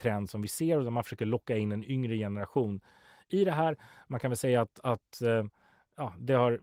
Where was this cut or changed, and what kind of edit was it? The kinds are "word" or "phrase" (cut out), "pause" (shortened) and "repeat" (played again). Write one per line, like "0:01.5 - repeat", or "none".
none